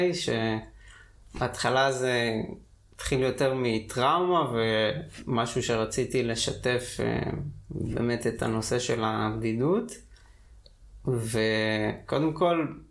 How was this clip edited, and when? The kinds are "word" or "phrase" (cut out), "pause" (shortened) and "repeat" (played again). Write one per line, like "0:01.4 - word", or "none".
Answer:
none